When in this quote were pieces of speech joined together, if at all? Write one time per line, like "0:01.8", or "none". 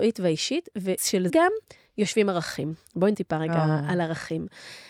0:01.0
0:01.3
0:03.1